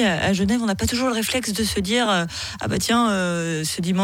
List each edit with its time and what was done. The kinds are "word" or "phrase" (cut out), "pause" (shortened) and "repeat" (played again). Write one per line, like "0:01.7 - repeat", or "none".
none